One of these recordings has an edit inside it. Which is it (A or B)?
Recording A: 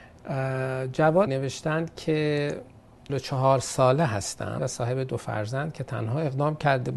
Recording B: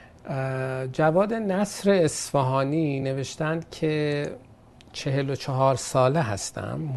A